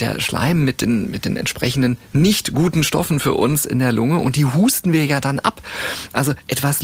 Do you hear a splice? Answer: no; 0 cuts

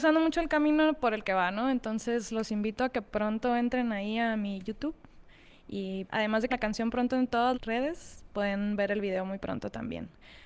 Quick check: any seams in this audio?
yes; 3 cuts; at 6.1 s, 6.5 s, 7.5 s

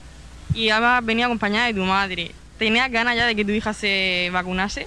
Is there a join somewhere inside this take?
no; 0 cuts

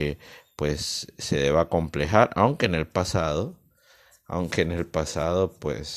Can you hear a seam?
no; 0 cuts

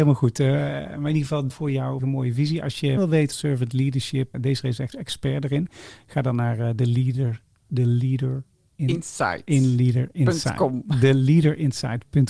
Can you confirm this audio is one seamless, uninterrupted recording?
no; 6 cuts; at 1.5 s, 2.0 s, 3.0 s, 3.3 s, 4.3 s, 4.9 s

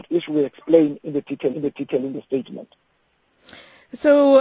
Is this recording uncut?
no; 1 cut; at 1.5 s

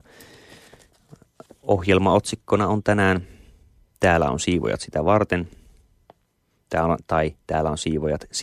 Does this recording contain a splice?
no; 0 cuts

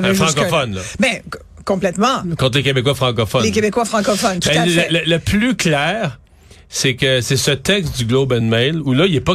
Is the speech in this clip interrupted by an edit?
no; 0 cuts

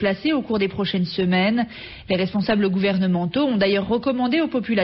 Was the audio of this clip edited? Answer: no; 0 cuts

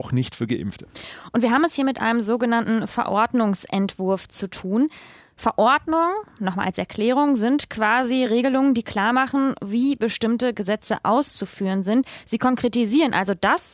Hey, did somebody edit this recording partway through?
no; 0 cuts

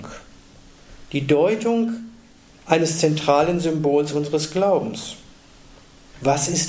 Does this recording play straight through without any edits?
yes; 0 cuts

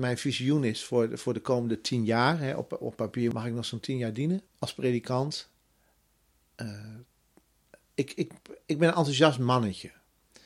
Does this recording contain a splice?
no; 0 cuts

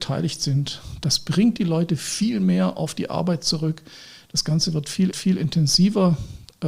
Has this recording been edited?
yes; 2 cuts; at 3.1 s, 5.1 s

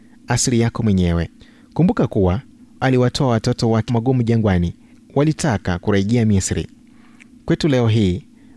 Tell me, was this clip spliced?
yes; 4 cuts; at 1.4 s, 2.8 s, 3.9 s, 4.9 s

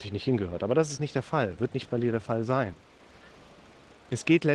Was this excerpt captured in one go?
yes; 0 cuts

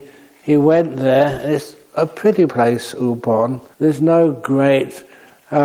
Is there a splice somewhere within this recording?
yes; 2 cuts; at 2.5 s, 3.7 s

